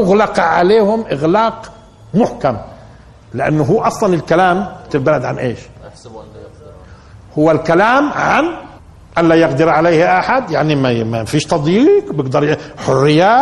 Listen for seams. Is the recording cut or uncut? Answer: cut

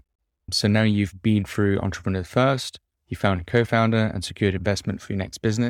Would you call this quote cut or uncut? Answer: uncut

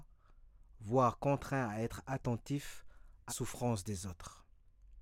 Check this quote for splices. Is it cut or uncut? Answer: cut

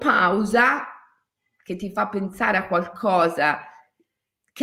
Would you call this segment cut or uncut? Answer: uncut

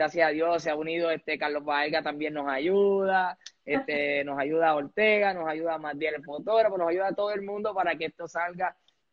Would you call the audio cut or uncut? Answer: uncut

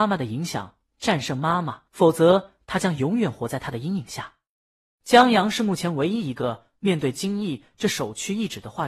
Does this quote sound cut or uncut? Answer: cut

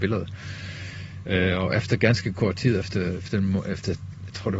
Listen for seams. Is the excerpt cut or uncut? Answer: uncut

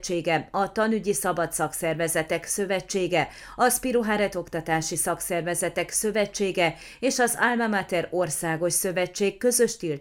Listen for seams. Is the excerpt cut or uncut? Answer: uncut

